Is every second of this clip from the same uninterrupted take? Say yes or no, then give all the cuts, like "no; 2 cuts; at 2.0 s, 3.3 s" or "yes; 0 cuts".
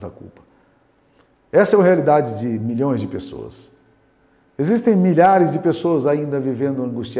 yes; 0 cuts